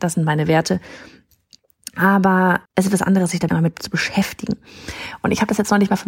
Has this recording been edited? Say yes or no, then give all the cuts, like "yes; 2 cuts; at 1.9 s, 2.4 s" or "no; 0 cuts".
yes; 2 cuts; at 2.7 s, 3.5 s